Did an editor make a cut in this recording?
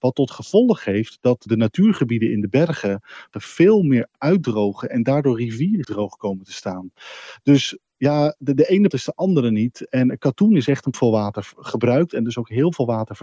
yes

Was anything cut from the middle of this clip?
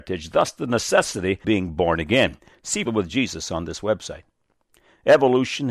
yes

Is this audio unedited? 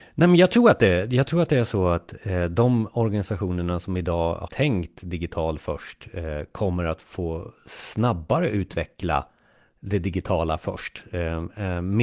no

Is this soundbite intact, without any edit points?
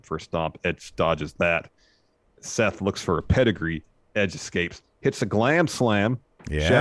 yes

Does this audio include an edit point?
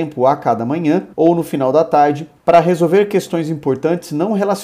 yes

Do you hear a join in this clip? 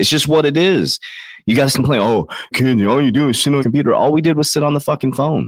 yes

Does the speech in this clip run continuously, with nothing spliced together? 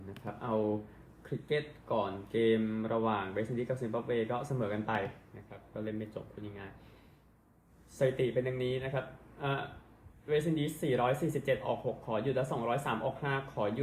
yes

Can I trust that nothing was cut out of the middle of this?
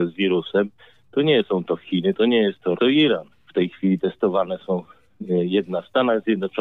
no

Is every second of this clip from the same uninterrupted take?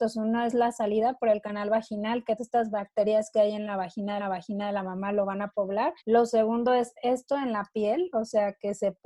no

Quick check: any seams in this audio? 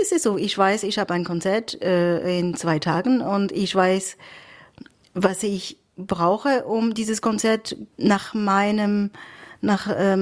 yes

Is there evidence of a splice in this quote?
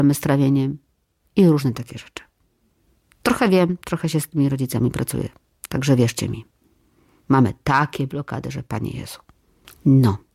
no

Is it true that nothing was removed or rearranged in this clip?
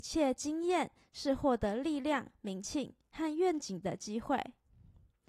yes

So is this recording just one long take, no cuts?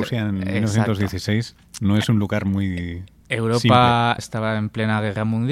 no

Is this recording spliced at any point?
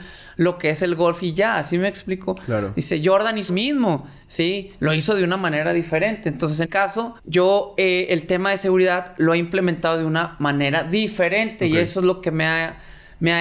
yes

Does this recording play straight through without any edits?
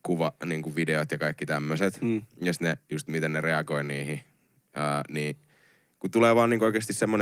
yes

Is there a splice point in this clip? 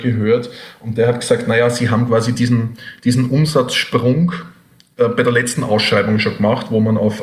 no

